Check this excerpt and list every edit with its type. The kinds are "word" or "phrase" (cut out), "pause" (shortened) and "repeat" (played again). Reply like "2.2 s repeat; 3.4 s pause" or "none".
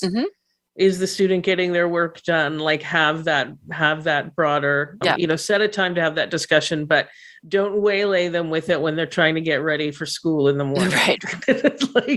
5.0 s word